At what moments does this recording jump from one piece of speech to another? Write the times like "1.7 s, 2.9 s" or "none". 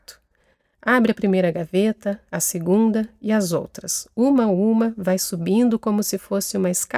none